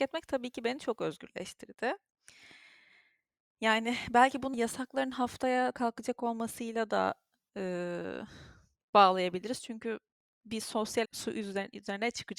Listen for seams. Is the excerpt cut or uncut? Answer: cut